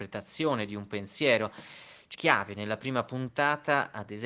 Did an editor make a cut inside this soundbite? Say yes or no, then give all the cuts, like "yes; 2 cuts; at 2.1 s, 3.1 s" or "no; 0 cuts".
yes; 1 cut; at 2.1 s